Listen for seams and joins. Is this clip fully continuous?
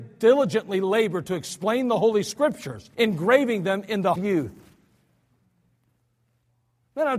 no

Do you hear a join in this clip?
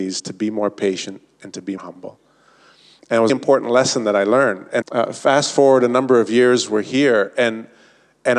yes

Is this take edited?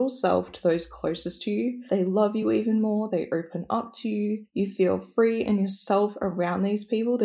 no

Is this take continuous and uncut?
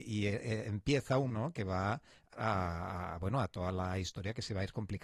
no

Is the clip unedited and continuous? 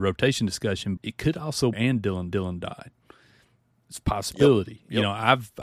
no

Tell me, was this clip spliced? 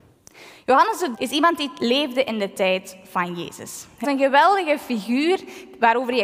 yes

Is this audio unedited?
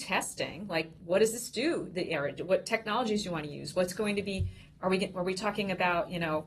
yes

